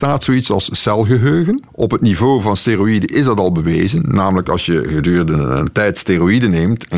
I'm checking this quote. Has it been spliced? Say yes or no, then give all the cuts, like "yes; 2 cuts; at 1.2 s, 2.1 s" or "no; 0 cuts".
yes; 1 cut; at 1.7 s